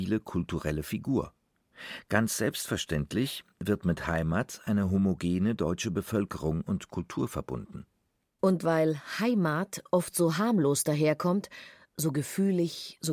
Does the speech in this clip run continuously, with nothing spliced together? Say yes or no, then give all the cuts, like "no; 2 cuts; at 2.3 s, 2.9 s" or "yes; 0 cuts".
yes; 0 cuts